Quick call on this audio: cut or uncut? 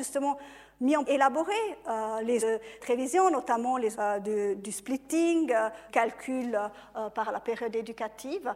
cut